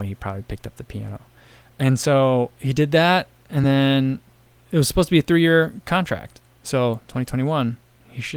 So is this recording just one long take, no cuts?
yes; 0 cuts

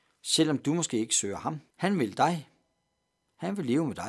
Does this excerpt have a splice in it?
yes; 1 cut; at 1.7 s

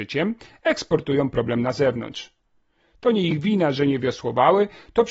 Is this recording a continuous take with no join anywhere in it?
yes; 0 cuts

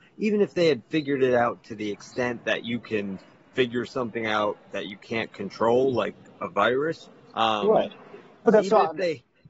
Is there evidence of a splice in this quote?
no; 0 cuts

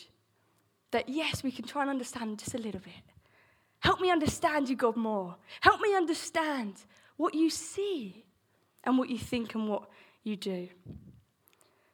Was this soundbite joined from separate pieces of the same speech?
no; 0 cuts

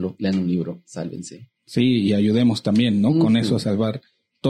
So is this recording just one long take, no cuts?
yes; 0 cuts

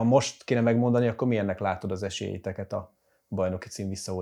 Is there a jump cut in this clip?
no; 0 cuts

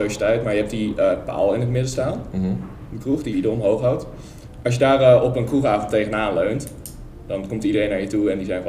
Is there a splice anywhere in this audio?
yes; 1 cut; at 3.3 s

